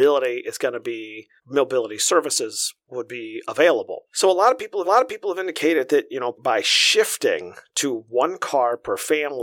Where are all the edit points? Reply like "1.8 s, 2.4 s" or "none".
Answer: 1.4 s, 4.1 s, 4.8 s, 6.3 s